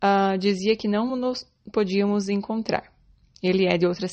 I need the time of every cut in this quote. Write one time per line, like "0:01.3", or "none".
none